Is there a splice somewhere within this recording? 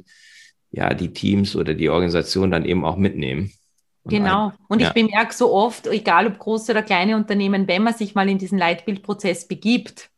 yes; 1 cut; at 4.6 s

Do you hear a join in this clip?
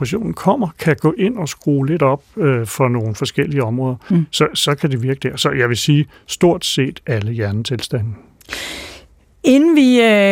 no; 0 cuts

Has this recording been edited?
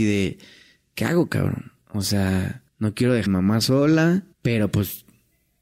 yes; 4 cuts; at 1.8 s, 2.7 s, 3.3 s, 4.3 s

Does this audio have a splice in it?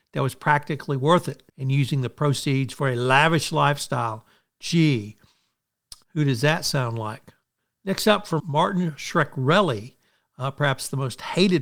yes; 4 cuts; at 1.5 s, 6.0 s, 7.6 s, 8.4 s

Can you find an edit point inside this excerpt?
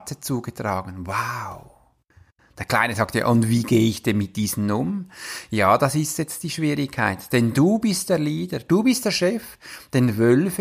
no; 0 cuts

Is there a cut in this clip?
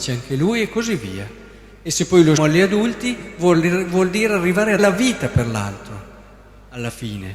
yes; 2 cuts; at 2.4 s, 4.8 s

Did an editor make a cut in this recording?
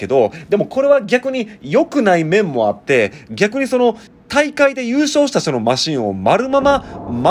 yes; 1 cut; at 4.1 s

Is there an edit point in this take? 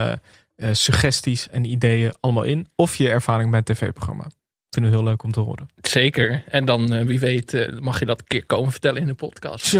no; 0 cuts

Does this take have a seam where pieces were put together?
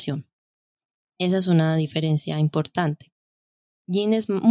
no; 0 cuts

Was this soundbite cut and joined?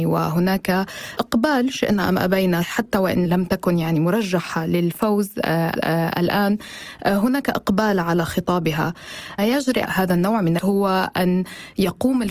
yes; 4 cuts; at 5.8 s, 9.4 s, 9.9 s, 10.6 s

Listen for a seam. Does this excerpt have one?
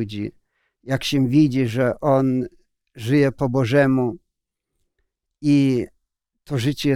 no; 0 cuts

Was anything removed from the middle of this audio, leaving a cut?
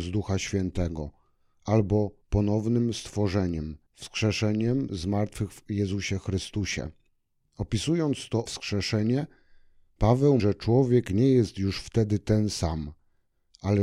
yes; 5 cuts; at 2.2 s, 3.9 s, 7.1 s, 8.5 s, 10.4 s

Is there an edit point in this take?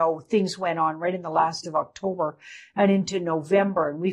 yes; 1 cut; at 1.6 s

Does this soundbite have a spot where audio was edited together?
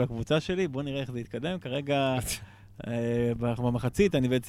yes; 1 cut; at 3.6 s

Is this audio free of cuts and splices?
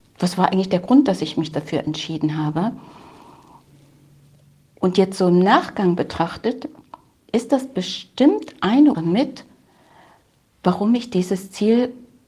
no; 2 cuts; at 1.5 s, 8.9 s

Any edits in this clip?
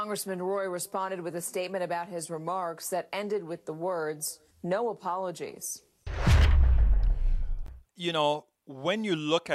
yes; 2 cuts; at 4.5 s, 7.9 s

